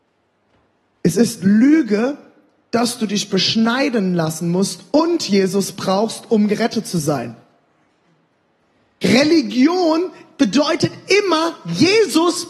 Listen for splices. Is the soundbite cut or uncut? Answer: uncut